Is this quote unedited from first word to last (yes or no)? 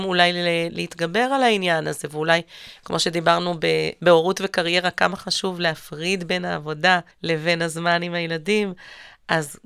no